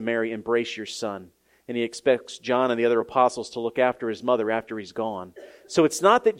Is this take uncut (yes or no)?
yes